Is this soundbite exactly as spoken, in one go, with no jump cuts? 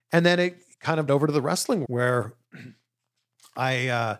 no; 2 cuts; at 1.1 s, 1.8 s

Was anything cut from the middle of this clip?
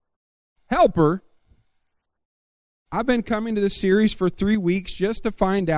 no; 0 cuts

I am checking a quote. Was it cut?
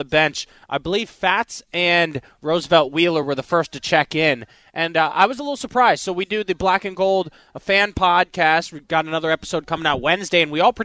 no; 0 cuts

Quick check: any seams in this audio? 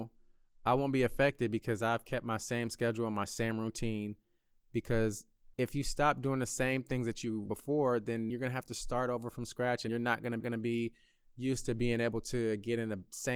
yes; 5 cuts; at 5.5 s, 7.5 s, 8.3 s, 9.9 s, 10.4 s

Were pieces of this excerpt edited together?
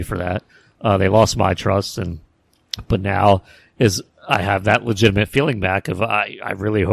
no; 0 cuts

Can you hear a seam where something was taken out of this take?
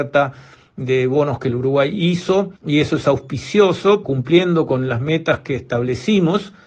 yes; 2 cuts; at 2.6 s, 4.0 s

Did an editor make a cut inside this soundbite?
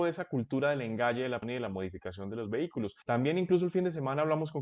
yes; 2 cuts; at 1.4 s, 3.0 s

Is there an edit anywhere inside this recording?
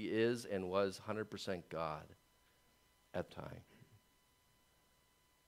yes; 1 cut; at 3.3 s

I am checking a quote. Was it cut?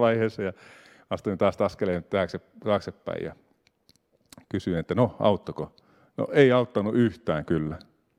no; 0 cuts

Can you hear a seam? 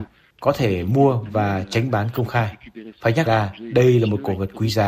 yes; 1 cut; at 3.3 s

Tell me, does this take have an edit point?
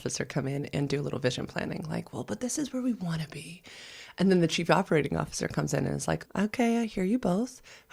yes; 1 cut; at 6.2 s

